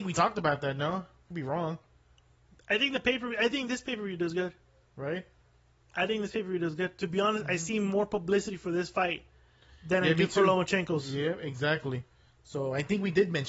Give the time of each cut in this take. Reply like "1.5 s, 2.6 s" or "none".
none